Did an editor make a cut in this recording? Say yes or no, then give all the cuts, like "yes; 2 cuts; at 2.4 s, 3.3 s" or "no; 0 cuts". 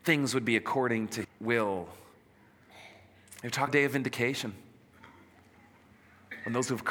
yes; 2 cuts; at 1.2 s, 3.7 s